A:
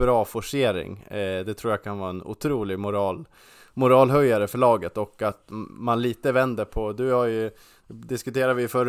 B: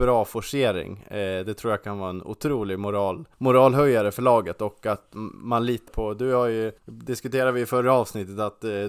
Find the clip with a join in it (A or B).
B